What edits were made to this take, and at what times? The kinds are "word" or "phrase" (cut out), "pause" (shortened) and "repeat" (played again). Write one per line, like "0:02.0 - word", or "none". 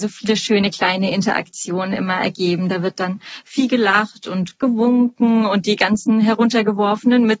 none